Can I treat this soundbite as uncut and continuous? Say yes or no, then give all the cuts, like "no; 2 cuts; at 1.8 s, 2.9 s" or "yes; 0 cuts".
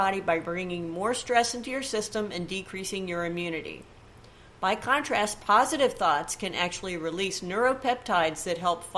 yes; 0 cuts